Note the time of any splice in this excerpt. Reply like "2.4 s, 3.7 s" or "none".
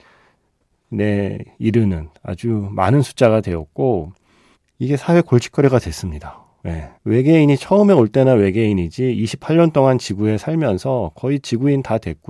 4.5 s, 7.0 s

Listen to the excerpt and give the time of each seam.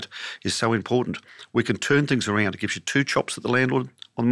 none

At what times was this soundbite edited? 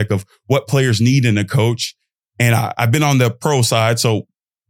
none

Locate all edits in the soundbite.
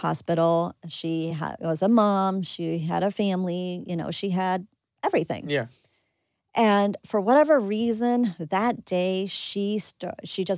none

